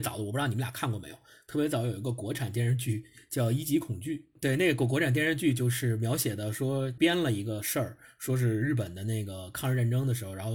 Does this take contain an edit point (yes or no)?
no